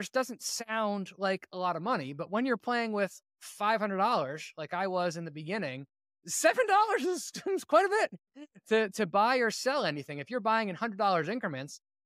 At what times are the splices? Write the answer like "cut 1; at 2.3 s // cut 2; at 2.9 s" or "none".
none

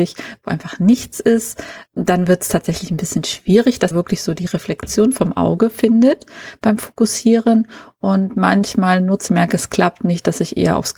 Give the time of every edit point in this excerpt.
cut 1; at 1.9 s // cut 2; at 3.9 s // cut 3; at 9.3 s

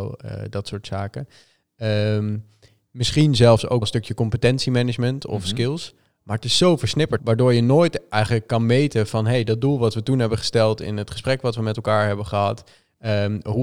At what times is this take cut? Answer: cut 1; at 3.8 s // cut 2; at 7.2 s

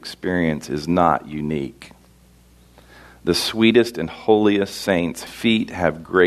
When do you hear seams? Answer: cut 1; at 5.3 s

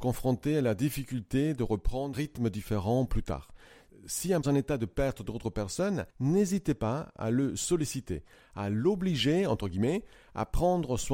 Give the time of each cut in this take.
cut 1; at 2.1 s // cut 2; at 4.4 s // cut 3; at 5.2 s

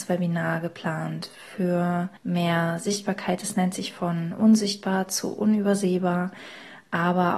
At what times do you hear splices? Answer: cut 1; at 2.2 s

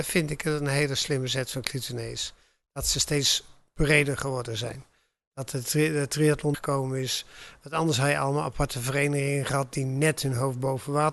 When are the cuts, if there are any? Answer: cut 1; at 6.5 s

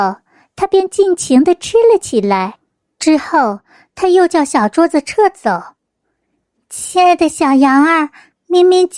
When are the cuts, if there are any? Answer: cut 1; at 2.7 s

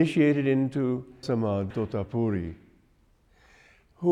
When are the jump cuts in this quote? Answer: cut 1; at 1.2 s // cut 2; at 1.7 s

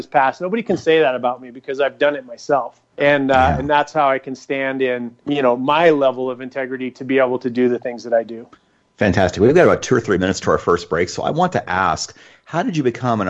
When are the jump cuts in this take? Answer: cut 1; at 2.9 s // cut 2; at 5.2 s

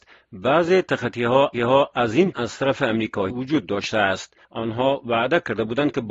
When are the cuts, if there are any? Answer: cut 1; at 1.5 s // cut 2; at 2.3 s // cut 3; at 3.3 s // cut 4; at 4.4 s

